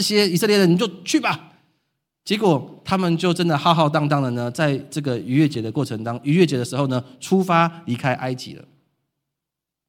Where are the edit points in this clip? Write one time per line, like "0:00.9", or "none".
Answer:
none